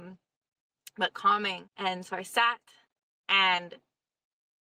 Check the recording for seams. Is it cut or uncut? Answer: cut